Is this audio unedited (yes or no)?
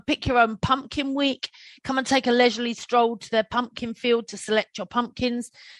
yes